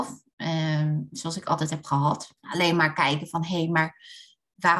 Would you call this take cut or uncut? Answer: cut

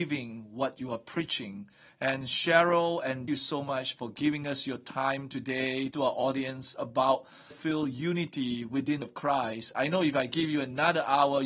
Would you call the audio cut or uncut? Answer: cut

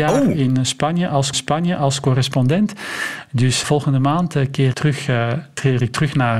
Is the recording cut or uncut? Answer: cut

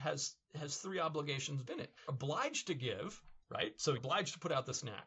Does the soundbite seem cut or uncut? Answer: cut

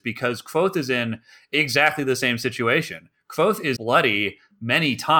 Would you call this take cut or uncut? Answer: cut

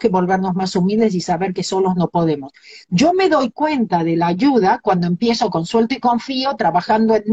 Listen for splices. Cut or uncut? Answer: uncut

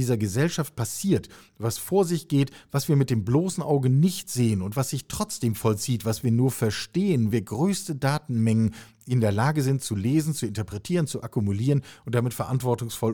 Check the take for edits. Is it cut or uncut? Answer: cut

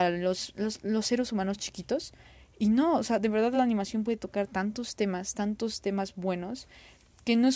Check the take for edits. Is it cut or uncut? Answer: uncut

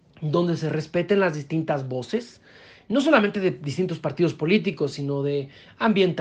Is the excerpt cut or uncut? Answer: uncut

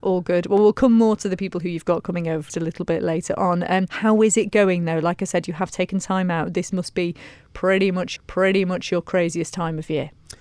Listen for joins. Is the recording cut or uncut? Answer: cut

